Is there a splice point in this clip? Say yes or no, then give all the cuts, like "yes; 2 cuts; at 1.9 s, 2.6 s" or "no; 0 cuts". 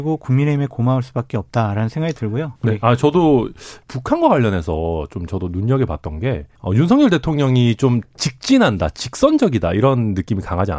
yes; 3 cuts; at 2.6 s, 3.8 s, 6.6 s